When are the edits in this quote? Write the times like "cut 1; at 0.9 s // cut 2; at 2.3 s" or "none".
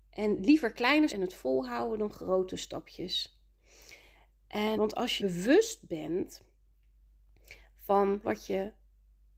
cut 1; at 1.1 s // cut 2; at 4.7 s // cut 3; at 5.2 s // cut 4; at 8.2 s